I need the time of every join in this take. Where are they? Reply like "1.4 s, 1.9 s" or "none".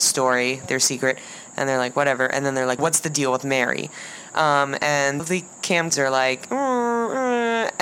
2.8 s, 5.2 s, 5.9 s